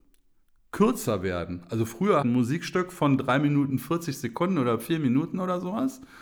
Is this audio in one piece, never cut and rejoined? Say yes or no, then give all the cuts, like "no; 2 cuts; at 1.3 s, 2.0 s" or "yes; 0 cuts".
no; 1 cut; at 2.2 s